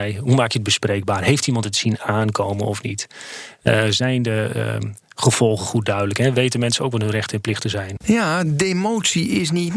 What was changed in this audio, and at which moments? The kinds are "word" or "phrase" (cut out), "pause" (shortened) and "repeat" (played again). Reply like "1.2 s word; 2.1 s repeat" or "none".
none